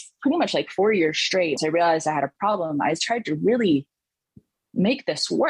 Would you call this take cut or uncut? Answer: cut